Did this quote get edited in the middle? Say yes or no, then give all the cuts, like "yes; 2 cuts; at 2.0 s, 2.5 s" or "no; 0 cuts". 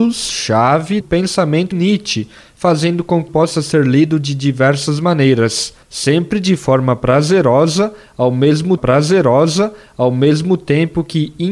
yes; 5 cuts; at 1.0 s, 1.7 s, 3.3 s, 5.8 s, 8.8 s